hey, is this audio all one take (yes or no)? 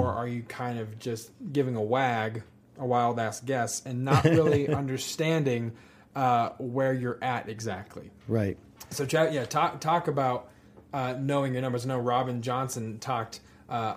yes